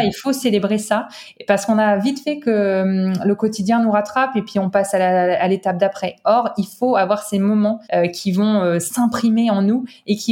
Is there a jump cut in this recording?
yes; 1 cut; at 7.8 s

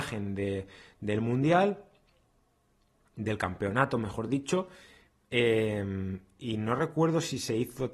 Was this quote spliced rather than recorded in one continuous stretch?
no; 0 cuts

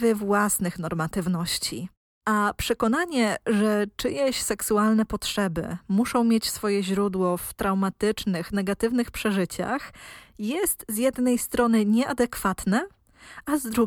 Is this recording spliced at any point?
no; 0 cuts

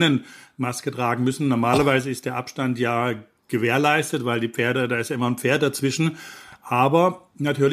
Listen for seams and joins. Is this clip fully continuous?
yes; 0 cuts

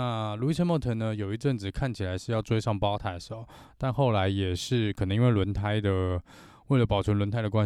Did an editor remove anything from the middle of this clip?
no; 0 cuts

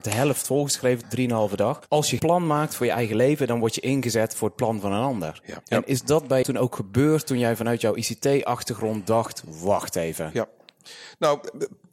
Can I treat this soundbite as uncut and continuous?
no; 5 cuts; at 1.0 s, 1.9 s, 2.2 s, 5.6 s, 6.4 s

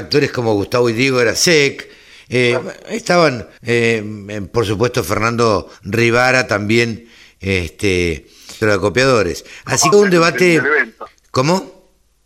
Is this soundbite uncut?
no; 5 cuts; at 1.4 s, 3.6 s, 5.7 s, 8.6 s, 9.9 s

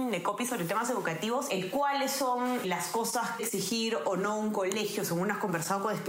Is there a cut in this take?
yes; 3 cuts; at 1.5 s, 2.6 s, 3.4 s

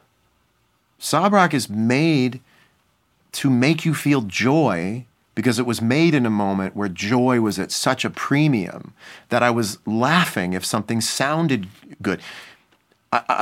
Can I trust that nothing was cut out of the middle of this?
yes; 0 cuts

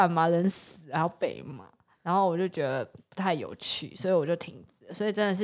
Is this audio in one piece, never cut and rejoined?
yes; 0 cuts

